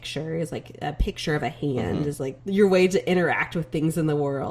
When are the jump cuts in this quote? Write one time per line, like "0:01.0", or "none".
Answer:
0:02.4